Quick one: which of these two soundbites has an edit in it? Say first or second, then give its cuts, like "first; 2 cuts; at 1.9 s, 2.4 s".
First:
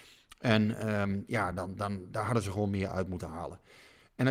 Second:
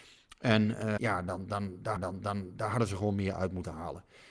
second; 2 cuts; at 1.0 s, 2.0 s